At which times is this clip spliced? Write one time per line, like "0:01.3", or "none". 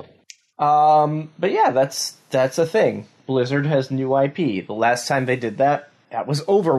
none